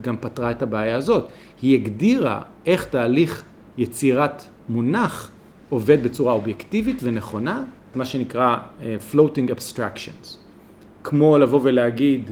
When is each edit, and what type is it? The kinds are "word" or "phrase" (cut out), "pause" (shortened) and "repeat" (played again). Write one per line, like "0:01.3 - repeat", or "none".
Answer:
0:07.9 - word

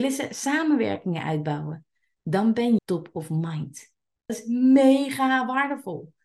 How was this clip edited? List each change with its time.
0:02.8 - word
0:04.3 - word

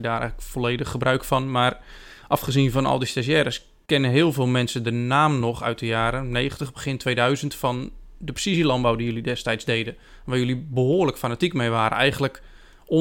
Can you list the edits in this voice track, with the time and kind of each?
none

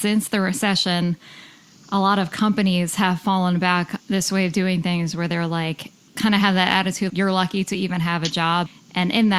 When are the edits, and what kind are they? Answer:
0:04.0 - word
0:06.1 - word
0:07.1 - word

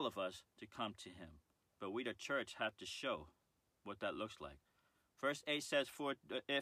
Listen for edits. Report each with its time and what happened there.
0:01.6 - pause

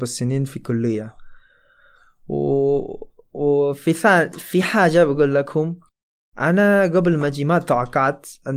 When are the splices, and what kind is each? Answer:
none

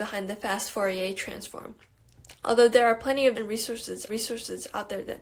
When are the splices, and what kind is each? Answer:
0:03.3 - word
0:04.1 - repeat

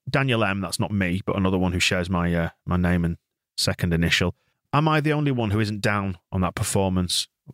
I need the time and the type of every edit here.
none

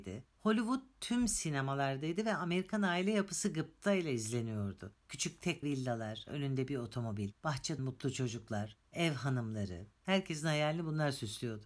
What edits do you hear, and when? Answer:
0:05.6 - word
0:07.8 - word

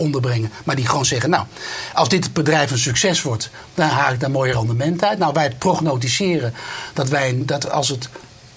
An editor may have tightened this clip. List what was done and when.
none

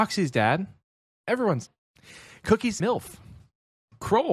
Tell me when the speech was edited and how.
0:01.1 - phrase
0:01.7 - word
0:02.8 - word

